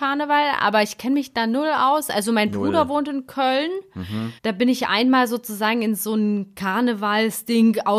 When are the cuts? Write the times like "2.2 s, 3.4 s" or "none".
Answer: 4.4 s

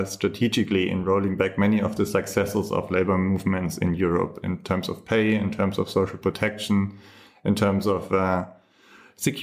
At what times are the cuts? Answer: none

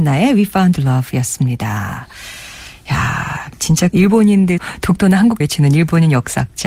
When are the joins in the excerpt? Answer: 3.9 s, 4.6 s, 5.4 s

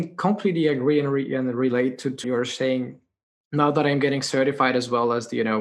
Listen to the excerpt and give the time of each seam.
2.2 s

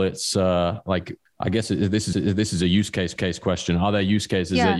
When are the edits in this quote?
1.3 s, 2.1 s, 3.2 s

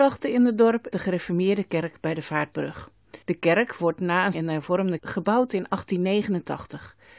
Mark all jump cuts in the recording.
0.9 s, 3.2 s, 4.3 s, 5.0 s

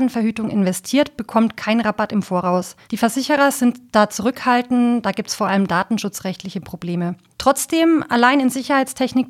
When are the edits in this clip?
2.8 s, 7.3 s

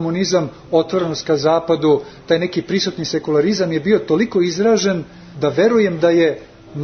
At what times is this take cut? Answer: none

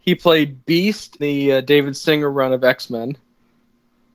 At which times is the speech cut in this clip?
1.2 s

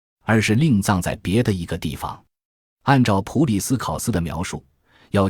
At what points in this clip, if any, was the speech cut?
none

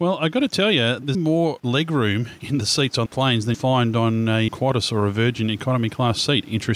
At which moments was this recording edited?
1.1 s, 3.1 s, 3.5 s, 4.5 s

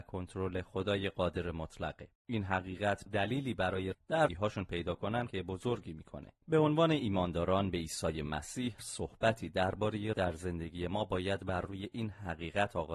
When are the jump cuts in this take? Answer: 2.2 s, 3.1 s, 3.9 s, 4.3 s, 5.3 s, 6.4 s, 8.8 s, 10.1 s

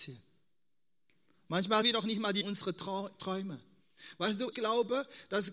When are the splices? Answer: 1.8 s, 2.4 s, 4.5 s

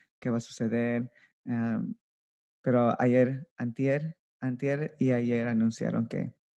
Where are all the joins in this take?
none

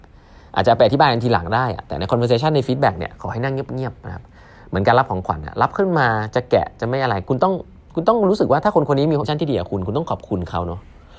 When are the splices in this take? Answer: 9.2 s

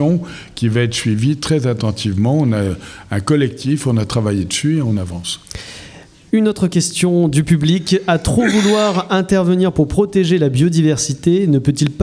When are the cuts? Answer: none

